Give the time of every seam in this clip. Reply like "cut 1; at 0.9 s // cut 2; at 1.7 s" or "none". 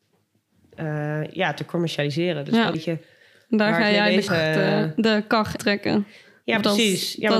cut 1; at 2.7 s // cut 2; at 4.3 s // cut 3; at 5.6 s